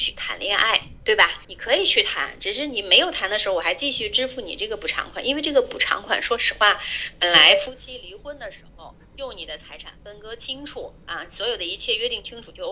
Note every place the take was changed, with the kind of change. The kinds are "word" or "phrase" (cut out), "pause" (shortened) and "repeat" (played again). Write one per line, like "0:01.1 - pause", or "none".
0:01.4 - pause
0:09.0 - pause
0:11.0 - pause